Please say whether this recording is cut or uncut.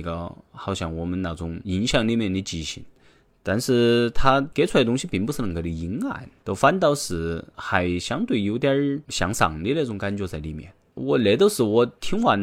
uncut